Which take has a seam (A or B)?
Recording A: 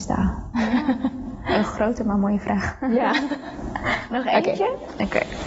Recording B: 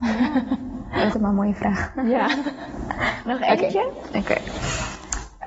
B